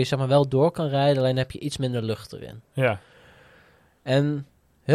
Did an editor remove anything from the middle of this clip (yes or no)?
no